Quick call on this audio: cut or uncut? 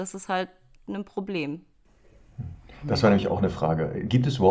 uncut